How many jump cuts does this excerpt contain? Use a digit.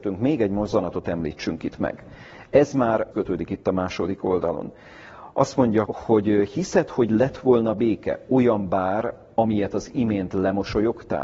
2